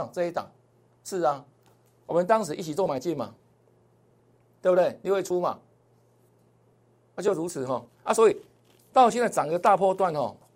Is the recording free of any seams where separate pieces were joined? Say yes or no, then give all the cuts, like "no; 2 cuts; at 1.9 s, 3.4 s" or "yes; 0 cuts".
yes; 0 cuts